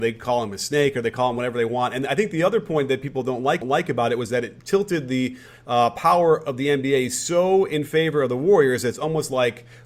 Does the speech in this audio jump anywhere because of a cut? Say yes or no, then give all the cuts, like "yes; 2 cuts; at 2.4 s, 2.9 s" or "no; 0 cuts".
yes; 1 cut; at 3.6 s